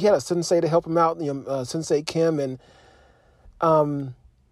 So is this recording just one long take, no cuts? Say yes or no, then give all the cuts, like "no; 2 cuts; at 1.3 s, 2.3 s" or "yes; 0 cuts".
yes; 0 cuts